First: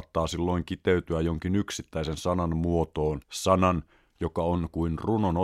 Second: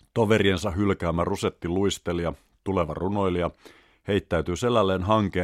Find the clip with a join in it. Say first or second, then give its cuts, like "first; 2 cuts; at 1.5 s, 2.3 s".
first; 1 cut; at 3.2 s